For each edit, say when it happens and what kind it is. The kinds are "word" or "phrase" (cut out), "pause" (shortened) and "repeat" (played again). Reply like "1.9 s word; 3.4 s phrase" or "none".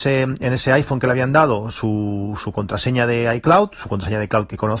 none